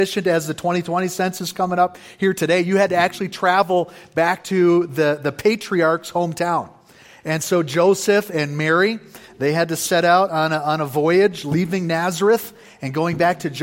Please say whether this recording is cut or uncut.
uncut